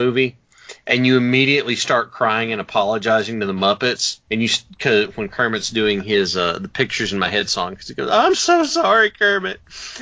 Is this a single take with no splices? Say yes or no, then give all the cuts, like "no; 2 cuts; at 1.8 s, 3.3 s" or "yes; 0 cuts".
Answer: no; 1 cut; at 4.2 s